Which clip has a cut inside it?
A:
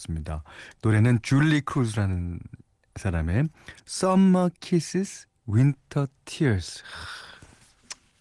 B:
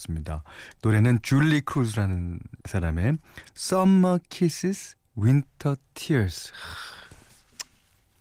B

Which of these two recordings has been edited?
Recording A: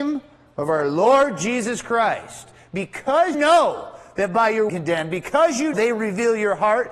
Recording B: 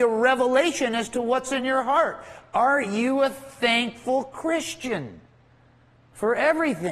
A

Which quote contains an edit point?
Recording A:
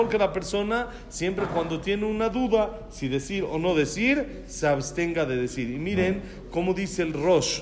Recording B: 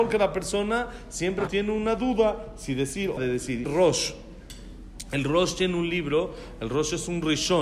B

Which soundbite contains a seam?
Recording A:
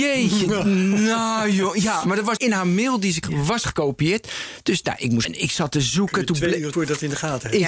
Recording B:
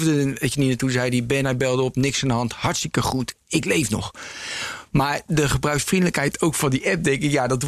A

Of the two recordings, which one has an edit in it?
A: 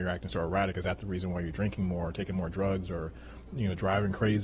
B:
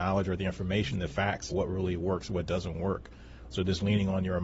B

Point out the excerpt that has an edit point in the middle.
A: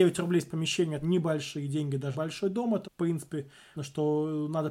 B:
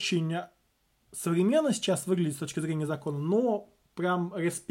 A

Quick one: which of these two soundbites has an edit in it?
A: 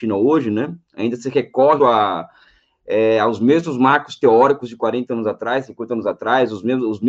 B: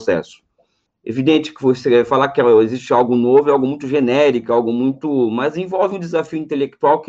A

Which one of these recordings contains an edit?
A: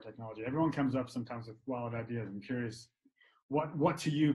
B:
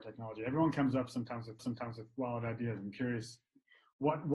B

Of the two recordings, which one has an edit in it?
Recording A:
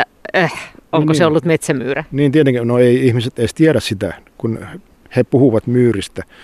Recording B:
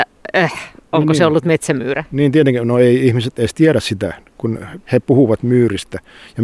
B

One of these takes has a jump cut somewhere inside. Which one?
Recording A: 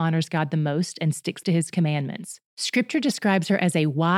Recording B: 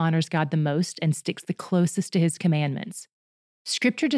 A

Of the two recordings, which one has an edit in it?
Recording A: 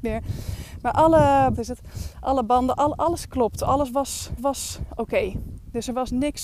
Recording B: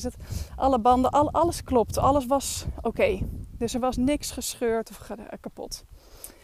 A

